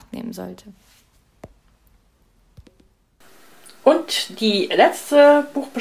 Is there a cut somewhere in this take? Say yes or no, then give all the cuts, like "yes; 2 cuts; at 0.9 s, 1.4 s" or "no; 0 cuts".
no; 0 cuts